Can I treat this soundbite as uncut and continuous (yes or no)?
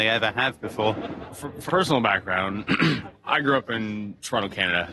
no